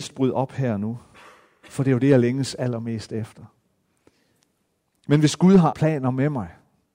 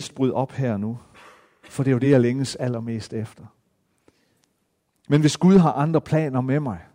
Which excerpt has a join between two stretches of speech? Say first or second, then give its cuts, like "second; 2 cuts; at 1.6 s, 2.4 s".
first; 1 cut; at 5.7 s